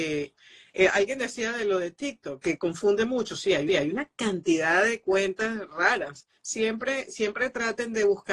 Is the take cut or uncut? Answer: cut